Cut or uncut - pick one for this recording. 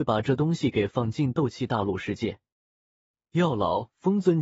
uncut